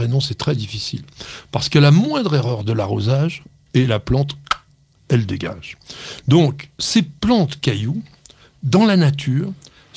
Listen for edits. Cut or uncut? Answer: uncut